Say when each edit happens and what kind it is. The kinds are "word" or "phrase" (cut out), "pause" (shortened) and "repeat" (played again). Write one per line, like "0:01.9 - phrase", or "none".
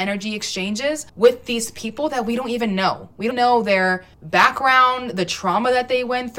0:01.1 - pause
0:03.3 - word
0:04.1 - pause